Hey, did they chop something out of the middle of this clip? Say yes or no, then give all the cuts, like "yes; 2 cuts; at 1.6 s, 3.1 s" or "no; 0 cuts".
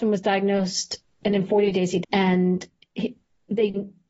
yes; 1 cut; at 2.0 s